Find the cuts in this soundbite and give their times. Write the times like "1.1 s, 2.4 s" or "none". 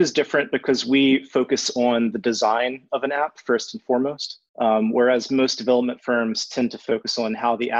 4.5 s

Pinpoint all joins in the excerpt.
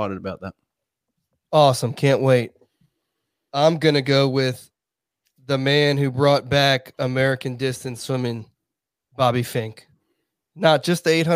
none

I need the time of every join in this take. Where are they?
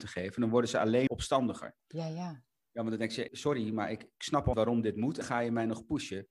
1.1 s, 1.8 s, 3.3 s, 4.5 s, 5.2 s

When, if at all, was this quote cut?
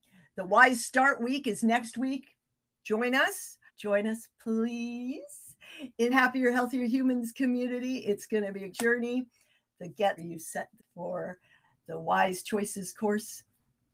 3.7 s, 6.1 s, 8.7 s, 10.2 s, 10.8 s

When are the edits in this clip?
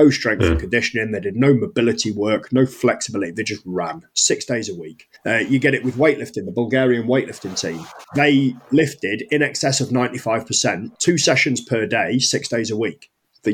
5.2 s, 8.0 s

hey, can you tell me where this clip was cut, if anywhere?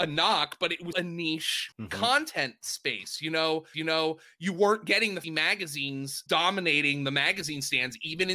0.9 s, 1.7 s, 3.7 s, 5.2 s, 6.3 s

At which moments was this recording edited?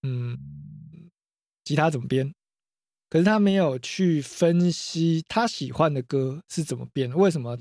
none

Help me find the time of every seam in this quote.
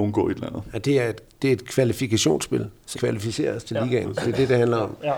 2.9 s

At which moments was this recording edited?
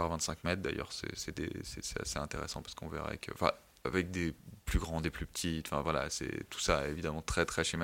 none

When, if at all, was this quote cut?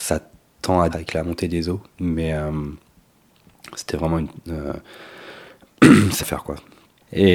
0.9 s, 1.9 s, 6.2 s

